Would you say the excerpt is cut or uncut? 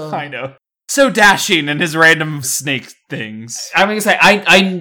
cut